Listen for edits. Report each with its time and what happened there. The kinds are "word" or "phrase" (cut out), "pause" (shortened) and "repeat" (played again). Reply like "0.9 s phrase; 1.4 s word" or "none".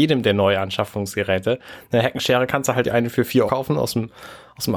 2.8 s word; 3.5 s word